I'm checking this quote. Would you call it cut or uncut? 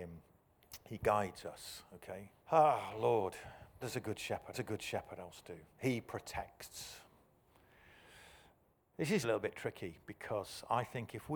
cut